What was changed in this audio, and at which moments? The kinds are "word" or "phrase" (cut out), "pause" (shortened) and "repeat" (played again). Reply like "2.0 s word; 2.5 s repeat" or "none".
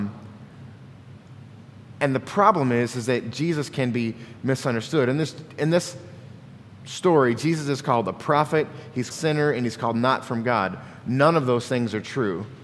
9.1 s phrase